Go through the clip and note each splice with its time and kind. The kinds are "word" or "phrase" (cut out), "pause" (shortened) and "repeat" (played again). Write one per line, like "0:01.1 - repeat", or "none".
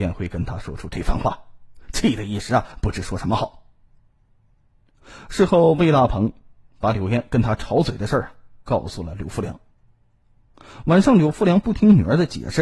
none